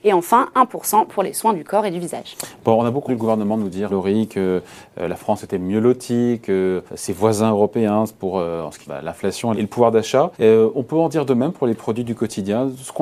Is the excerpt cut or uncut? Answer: cut